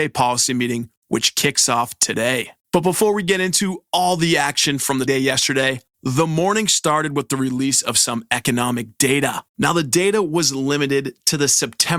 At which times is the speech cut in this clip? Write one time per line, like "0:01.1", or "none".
0:02.6
0:05.1
0:09.5